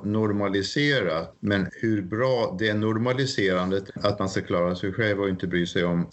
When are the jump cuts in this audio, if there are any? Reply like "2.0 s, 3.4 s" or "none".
3.9 s